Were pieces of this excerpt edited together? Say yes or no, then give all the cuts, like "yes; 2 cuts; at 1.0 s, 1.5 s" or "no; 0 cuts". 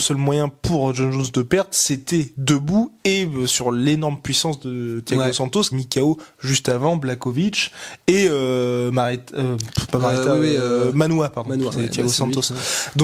yes; 2 cuts; at 5.7 s, 11.7 s